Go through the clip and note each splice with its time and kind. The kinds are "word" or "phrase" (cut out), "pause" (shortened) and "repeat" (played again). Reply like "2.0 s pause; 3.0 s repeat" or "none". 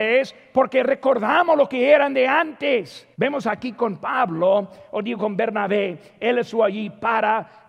3.1 s pause